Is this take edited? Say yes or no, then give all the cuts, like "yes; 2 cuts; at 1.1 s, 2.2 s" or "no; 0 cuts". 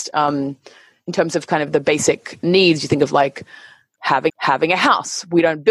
yes; 2 cuts; at 2.4 s, 4.3 s